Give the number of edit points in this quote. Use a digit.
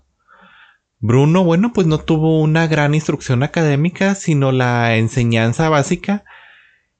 0